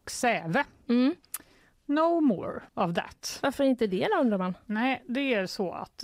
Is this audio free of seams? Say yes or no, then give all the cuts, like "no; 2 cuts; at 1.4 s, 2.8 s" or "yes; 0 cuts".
no; 1 cut; at 2.7 s